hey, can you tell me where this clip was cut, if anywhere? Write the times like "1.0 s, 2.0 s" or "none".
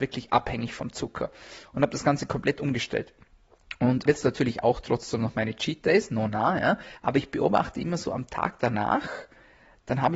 4.1 s, 7.0 s

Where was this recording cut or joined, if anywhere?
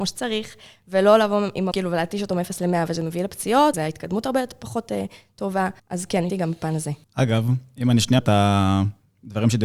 1.7 s, 3.7 s, 5.8 s, 6.3 s, 7.0 s, 8.2 s

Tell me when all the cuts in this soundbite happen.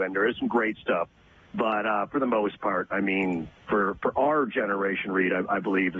none

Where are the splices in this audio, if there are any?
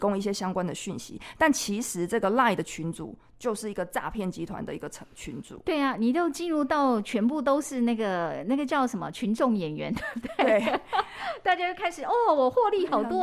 none

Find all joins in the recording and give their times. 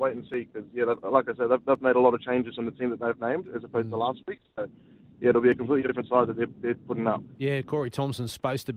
none

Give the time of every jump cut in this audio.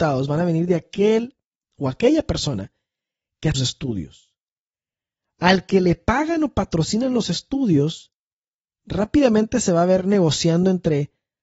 3.5 s

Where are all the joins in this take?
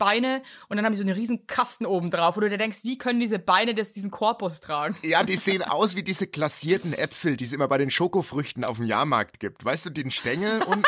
none

